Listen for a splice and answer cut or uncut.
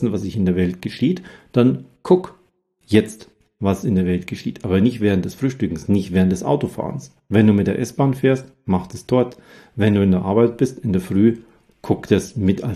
uncut